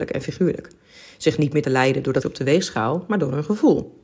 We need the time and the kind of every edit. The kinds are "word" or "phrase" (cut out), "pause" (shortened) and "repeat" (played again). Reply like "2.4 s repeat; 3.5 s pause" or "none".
1.6 s word; 2.2 s word